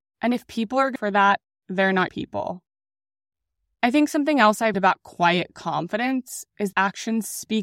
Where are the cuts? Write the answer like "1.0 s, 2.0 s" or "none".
1.0 s, 2.1 s, 4.7 s, 6.7 s

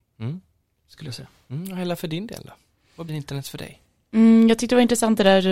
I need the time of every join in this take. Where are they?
3.1 s

